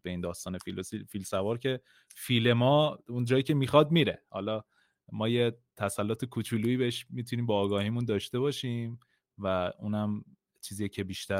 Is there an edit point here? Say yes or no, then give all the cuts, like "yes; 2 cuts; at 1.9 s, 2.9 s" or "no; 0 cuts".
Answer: no; 0 cuts